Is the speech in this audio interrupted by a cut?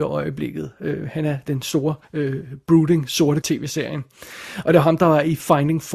yes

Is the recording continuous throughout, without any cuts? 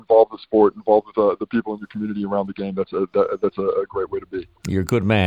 yes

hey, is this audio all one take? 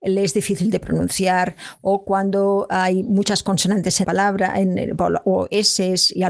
no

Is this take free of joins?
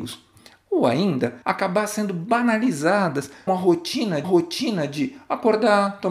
no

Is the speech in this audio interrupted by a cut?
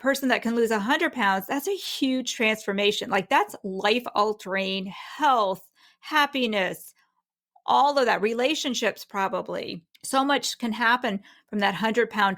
yes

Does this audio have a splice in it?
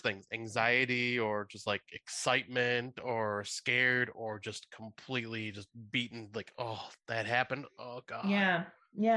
no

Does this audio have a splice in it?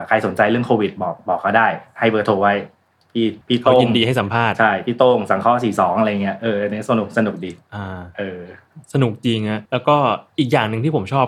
yes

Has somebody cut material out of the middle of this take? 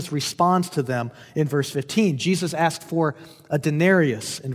no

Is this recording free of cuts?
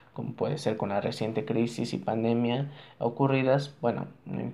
yes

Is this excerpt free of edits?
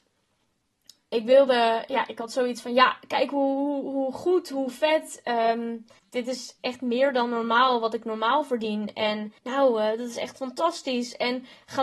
no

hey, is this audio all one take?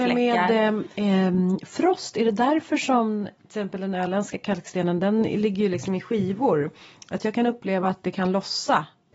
yes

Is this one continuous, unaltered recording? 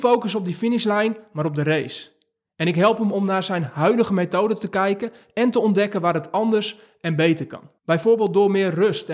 no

